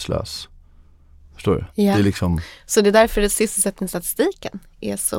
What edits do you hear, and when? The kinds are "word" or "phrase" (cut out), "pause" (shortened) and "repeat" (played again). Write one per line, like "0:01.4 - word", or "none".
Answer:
0:01.7 - pause